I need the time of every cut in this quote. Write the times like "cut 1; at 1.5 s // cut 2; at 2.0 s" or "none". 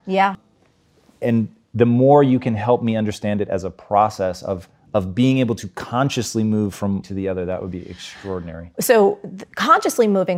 cut 1; at 7.0 s